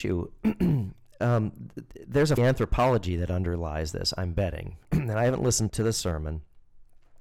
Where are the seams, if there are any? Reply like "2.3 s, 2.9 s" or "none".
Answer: 2.4 s, 5.7 s